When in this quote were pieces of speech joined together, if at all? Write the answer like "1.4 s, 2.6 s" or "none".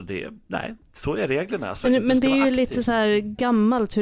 none